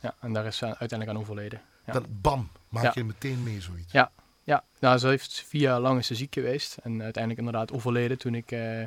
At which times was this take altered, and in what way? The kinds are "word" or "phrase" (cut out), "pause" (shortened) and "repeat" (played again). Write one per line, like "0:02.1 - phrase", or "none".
none